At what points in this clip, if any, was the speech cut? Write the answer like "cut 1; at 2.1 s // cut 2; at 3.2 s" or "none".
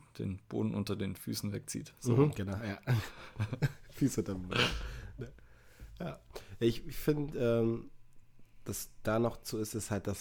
none